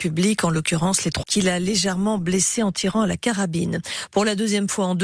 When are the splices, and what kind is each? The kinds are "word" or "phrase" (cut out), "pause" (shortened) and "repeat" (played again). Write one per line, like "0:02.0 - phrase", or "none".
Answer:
0:01.2 - word